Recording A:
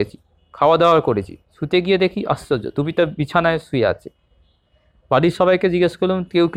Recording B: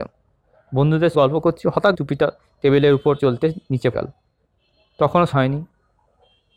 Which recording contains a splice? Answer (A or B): B